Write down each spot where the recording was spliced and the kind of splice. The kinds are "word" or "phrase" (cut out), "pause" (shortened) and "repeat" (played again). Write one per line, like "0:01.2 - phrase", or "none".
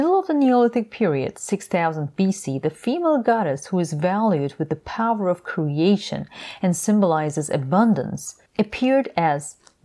0:08.5 - pause